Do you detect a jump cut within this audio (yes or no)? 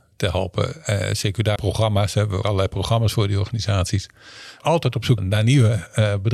yes